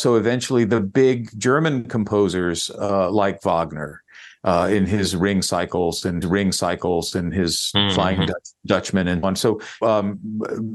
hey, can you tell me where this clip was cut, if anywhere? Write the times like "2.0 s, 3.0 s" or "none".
6.2 s, 9.2 s, 9.8 s